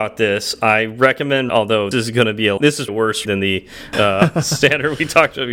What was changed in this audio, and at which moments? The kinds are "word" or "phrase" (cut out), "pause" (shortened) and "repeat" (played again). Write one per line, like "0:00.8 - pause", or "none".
0:01.5 - word
0:01.9 - word
0:02.6 - word
0:02.9 - word
0:03.3 - word
0:03.9 - word